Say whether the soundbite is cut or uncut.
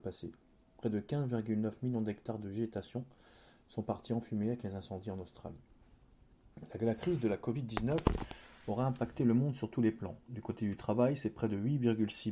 uncut